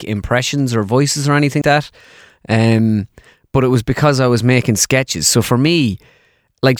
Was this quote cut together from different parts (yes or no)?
yes